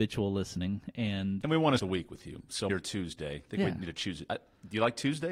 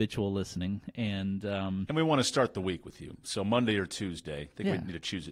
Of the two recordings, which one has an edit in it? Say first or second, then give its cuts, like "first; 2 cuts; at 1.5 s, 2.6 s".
first; 3 cuts; at 1.4 s, 1.8 s, 2.7 s